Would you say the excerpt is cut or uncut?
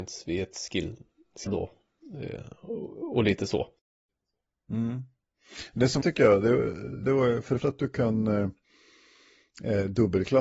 cut